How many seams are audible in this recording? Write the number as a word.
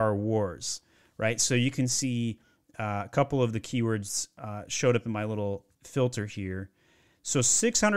one